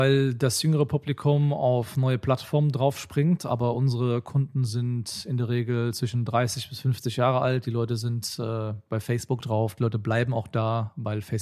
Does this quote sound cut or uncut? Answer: uncut